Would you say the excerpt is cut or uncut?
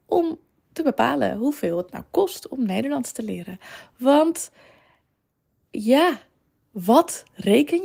uncut